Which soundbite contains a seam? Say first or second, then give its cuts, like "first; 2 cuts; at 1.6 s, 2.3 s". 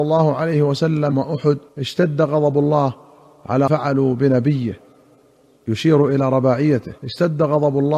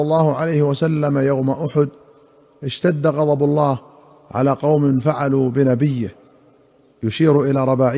first; 4 cuts; at 1.1 s, 1.7 s, 3.7 s, 7.0 s